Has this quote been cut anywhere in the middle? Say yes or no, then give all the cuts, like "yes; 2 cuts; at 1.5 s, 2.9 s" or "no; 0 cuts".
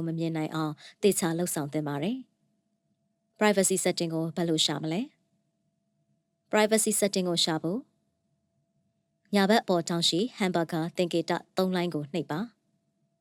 no; 0 cuts